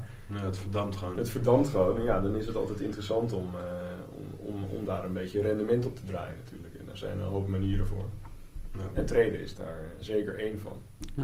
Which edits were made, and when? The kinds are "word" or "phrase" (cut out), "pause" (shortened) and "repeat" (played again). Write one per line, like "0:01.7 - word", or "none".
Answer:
none